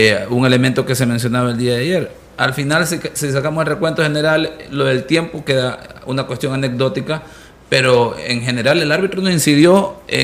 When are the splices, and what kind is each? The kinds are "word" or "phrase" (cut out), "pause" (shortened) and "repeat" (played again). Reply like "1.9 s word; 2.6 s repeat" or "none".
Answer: none

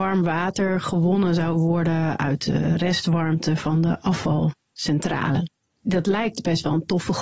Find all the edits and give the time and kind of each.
none

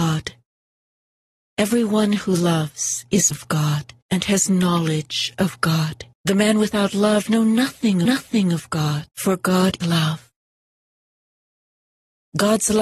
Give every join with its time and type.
3.3 s word; 4.0 s pause; 6.1 s pause; 7.3 s word; 8.0 s repeat; 9.1 s pause; 9.8 s word

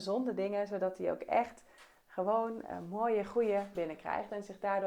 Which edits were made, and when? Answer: 3.7 s word

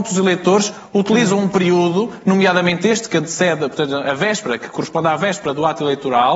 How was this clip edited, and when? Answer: none

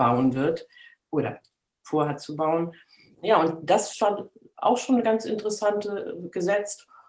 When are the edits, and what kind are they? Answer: 3.9 s phrase

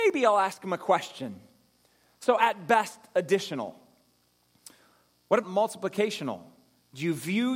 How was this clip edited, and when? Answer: 5.4 s word

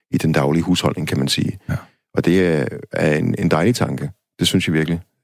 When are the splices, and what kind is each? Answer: none

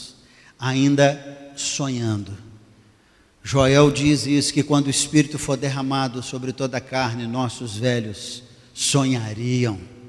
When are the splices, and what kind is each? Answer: none

